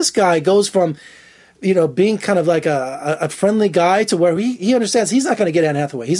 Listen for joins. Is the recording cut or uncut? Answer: uncut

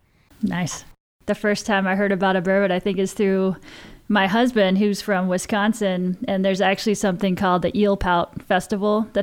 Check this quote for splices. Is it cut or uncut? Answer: uncut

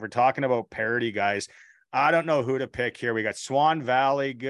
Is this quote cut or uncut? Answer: uncut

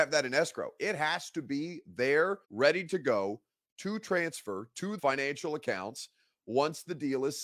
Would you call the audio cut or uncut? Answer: cut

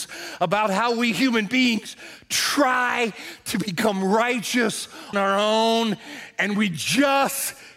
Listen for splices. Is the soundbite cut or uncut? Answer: cut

